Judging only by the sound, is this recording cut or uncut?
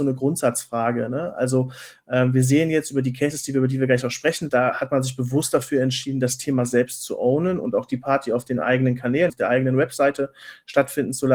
cut